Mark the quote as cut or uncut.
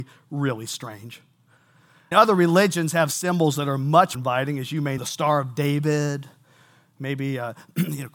cut